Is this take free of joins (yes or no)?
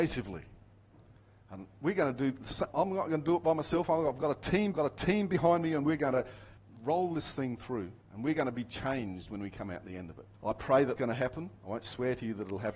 no